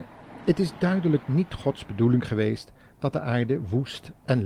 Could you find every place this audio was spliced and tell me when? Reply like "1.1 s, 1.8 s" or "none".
none